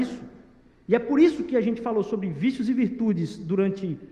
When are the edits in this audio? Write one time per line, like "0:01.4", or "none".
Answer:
none